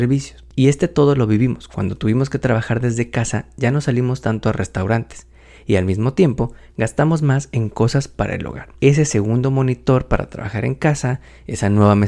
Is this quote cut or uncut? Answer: uncut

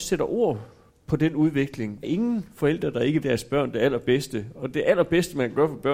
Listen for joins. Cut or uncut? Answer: cut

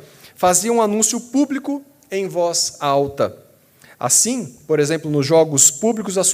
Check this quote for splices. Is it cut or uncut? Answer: uncut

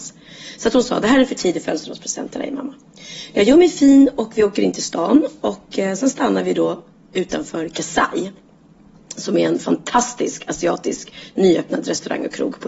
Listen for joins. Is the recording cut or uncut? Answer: uncut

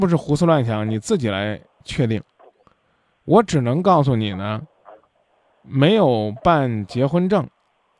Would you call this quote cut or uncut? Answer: uncut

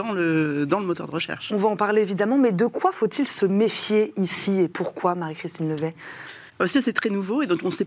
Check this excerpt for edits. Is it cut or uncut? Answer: cut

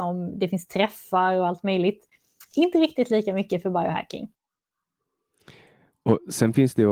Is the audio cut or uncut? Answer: uncut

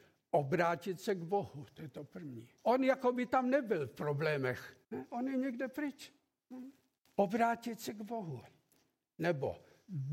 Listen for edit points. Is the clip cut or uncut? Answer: cut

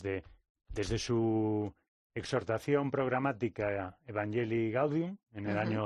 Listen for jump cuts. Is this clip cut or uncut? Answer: uncut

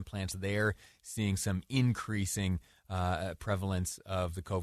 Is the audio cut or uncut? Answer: uncut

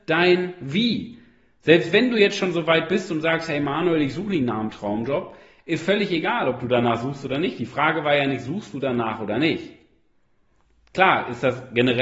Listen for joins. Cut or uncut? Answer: uncut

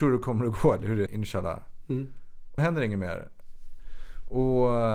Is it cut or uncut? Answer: cut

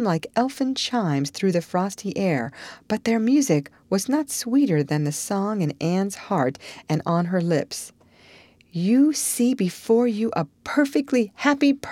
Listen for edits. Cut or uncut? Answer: uncut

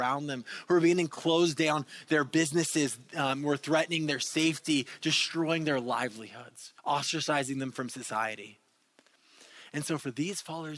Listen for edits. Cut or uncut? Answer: cut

